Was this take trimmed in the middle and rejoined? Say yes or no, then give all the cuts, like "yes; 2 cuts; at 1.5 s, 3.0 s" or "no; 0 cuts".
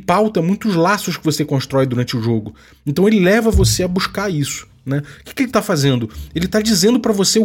no; 0 cuts